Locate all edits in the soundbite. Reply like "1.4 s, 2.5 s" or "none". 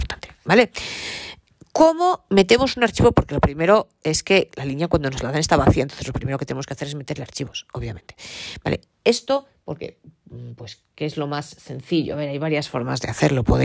none